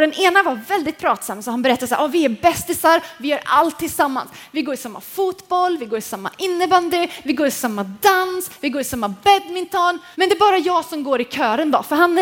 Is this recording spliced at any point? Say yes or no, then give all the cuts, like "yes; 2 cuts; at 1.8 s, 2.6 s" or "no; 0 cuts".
yes; 1 cut; at 10.1 s